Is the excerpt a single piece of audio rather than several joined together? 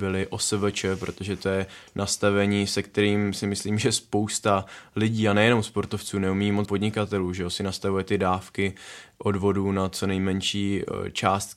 no; 1 cut; at 6.7 s

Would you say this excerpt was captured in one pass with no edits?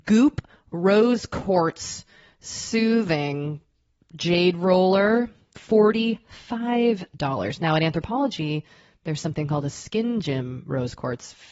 yes; 0 cuts

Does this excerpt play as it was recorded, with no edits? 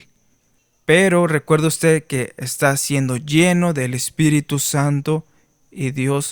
yes; 0 cuts

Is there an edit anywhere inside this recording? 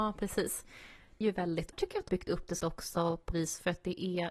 yes; 5 cuts; at 1.2 s, 1.7 s, 2.1 s, 2.6 s, 3.3 s

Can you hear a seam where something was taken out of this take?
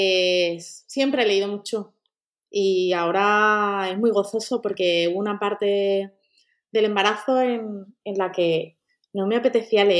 no; 0 cuts

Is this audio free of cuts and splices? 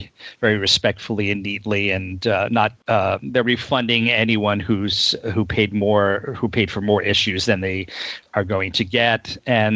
no; 1 cut; at 2.8 s

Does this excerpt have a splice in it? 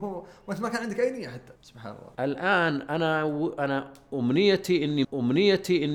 yes; 3 cuts; at 1.6 s, 2.1 s, 5.0 s

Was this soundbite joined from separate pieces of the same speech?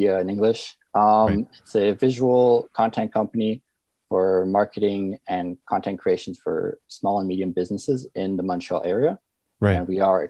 no; 0 cuts

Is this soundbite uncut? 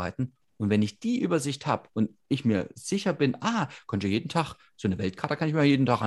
yes; 0 cuts

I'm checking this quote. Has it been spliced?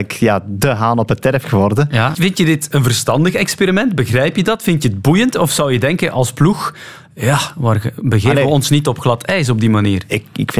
yes; 1 cut; at 2.1 s

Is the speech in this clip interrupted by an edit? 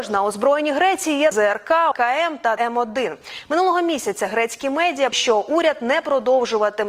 yes; 4 cuts; at 1.3 s, 1.9 s, 2.6 s, 5.1 s

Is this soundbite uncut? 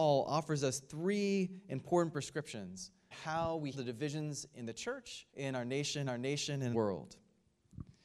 no; 5 cuts; at 3.1 s, 3.7 s, 5.3 s, 6.1 s, 6.7 s

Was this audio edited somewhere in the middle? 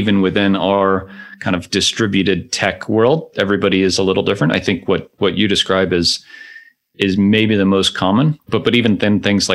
no; 0 cuts

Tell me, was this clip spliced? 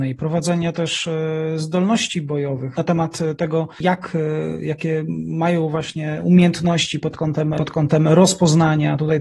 yes; 2 cuts; at 2.8 s, 7.6 s

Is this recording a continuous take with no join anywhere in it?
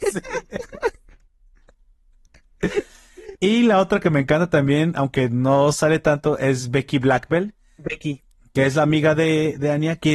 yes; 0 cuts

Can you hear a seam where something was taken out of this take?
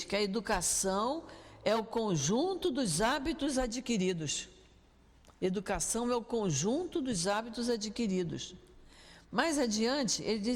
no; 0 cuts

